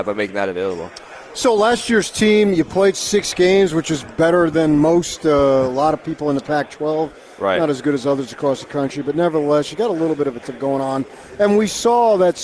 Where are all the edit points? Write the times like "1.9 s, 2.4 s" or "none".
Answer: 10.4 s